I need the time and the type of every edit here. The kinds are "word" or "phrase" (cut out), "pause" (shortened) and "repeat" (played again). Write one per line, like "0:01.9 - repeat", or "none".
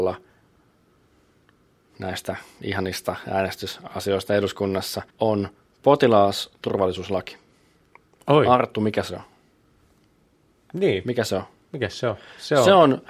0:05.1 - pause